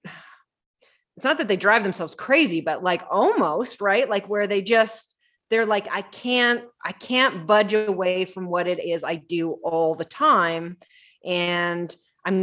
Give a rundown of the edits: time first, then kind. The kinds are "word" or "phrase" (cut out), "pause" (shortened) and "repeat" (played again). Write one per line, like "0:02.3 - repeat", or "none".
none